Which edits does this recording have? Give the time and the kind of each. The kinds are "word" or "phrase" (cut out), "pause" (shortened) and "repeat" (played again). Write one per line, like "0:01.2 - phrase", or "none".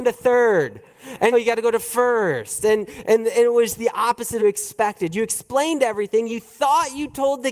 0:01.3 - phrase
0:04.4 - phrase